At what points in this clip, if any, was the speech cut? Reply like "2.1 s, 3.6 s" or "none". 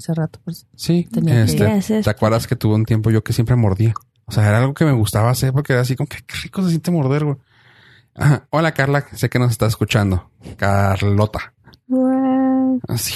none